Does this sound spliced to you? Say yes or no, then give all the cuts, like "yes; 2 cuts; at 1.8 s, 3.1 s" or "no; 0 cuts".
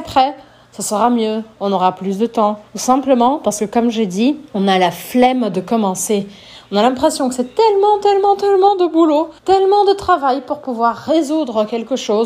yes; 3 cuts; at 2.7 s, 4.5 s, 9.4 s